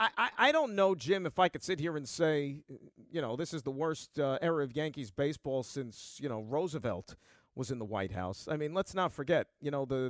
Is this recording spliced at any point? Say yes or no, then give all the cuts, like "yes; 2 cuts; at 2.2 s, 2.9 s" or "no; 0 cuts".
no; 0 cuts